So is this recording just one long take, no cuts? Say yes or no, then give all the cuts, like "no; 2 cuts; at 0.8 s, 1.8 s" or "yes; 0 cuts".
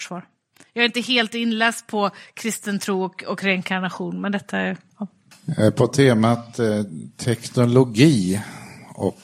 yes; 0 cuts